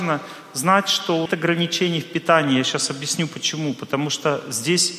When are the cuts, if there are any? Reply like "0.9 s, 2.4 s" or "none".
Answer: 1.3 s